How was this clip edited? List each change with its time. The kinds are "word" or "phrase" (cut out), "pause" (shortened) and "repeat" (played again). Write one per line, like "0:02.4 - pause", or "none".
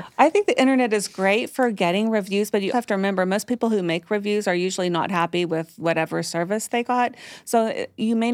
0:02.7 - word